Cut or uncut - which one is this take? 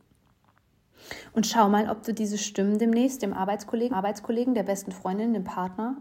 cut